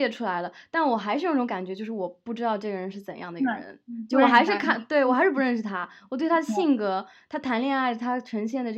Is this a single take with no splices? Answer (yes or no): yes